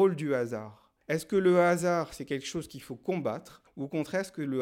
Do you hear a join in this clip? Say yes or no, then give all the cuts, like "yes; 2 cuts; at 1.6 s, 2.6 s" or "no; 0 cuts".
yes; 1 cut; at 1.0 s